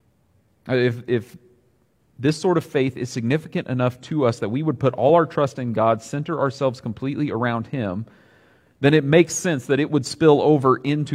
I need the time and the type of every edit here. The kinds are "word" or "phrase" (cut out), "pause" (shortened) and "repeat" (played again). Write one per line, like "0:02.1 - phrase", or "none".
none